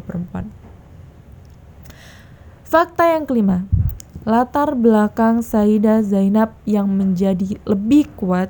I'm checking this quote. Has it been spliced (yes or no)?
no